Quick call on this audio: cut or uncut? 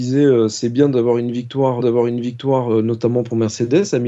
cut